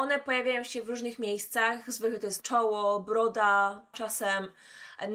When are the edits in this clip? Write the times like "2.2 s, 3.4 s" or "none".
2.4 s, 3.9 s